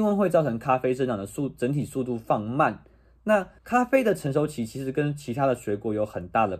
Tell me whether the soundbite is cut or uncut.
cut